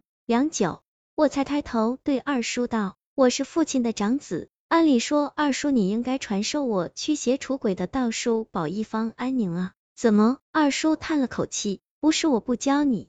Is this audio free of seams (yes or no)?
no